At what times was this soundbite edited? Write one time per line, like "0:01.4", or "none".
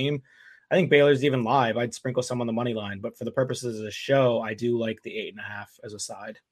none